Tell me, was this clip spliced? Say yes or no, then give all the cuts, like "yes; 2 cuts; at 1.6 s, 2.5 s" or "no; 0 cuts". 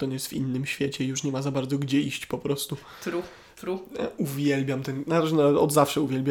no; 0 cuts